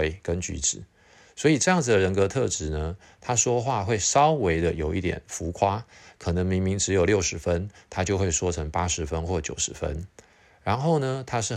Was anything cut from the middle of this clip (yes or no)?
no